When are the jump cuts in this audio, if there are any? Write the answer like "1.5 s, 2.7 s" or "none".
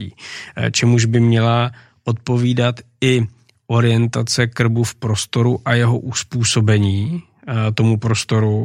none